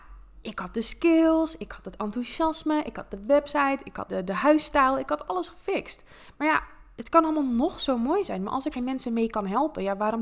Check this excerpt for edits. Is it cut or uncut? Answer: cut